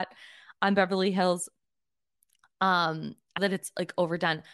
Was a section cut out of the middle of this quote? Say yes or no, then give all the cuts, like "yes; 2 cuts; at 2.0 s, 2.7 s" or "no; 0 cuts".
yes; 1 cut; at 3.4 s